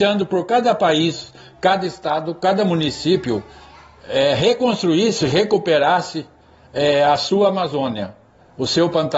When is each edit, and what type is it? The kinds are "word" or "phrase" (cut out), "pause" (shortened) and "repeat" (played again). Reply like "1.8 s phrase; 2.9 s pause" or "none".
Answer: none